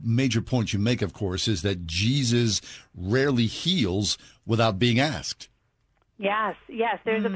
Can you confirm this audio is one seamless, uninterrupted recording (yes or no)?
yes